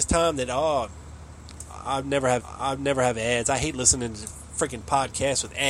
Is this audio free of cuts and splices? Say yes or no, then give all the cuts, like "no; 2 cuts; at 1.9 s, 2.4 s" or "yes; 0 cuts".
no; 1 cut; at 2.4 s